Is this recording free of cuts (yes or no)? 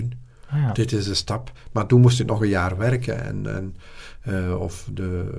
yes